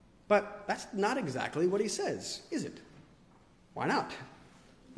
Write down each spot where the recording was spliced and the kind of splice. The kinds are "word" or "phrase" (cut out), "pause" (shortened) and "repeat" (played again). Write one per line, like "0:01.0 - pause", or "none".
none